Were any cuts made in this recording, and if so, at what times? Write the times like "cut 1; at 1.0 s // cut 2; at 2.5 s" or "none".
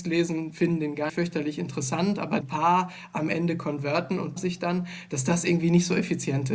cut 1; at 1.1 s // cut 2; at 2.4 s // cut 3; at 4.4 s